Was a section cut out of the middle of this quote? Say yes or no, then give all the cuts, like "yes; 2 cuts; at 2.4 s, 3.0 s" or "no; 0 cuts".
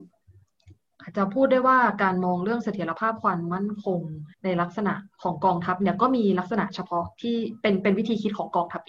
yes; 2 cuts; at 4.3 s, 5.1 s